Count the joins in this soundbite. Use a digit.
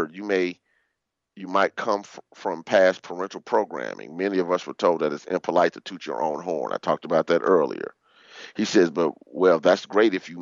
0